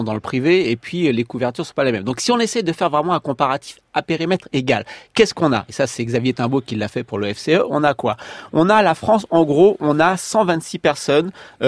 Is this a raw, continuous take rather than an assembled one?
yes; 0 cuts

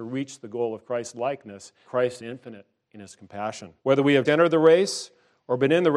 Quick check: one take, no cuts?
no; 4 cuts; at 1.8 s, 2.2 s, 3.8 s, 4.3 s

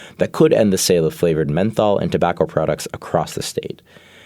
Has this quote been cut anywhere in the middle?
no; 0 cuts

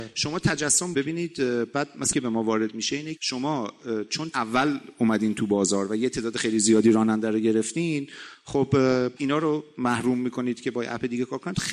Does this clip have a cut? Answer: yes; 5 cuts; at 0.9 s, 2.1 s, 3.2 s, 4.3 s, 9.2 s

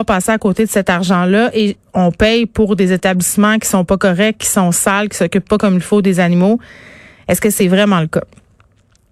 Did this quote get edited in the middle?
no; 0 cuts

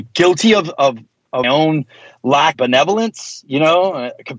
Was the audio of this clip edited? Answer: yes; 2 cuts; at 1.4 s, 2.5 s

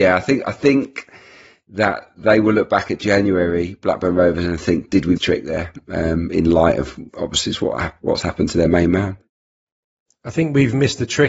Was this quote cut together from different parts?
yes; 2 cuts; at 5.2 s, 7.1 s

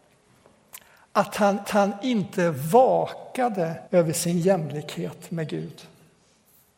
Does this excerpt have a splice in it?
yes; 2 cuts; at 1.6 s, 3.9 s

